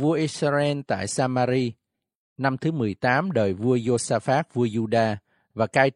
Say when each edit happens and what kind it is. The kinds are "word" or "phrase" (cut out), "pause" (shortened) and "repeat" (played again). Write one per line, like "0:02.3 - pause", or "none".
none